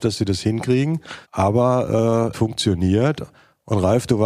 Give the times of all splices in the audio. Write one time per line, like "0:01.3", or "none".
0:01.2
0:02.3